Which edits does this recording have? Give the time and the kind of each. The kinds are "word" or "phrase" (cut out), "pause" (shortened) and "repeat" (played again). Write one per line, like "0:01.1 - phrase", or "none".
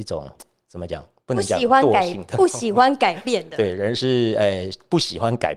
none